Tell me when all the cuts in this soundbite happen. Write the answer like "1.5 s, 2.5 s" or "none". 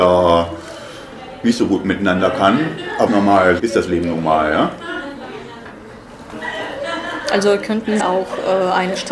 3.1 s, 3.6 s, 8.0 s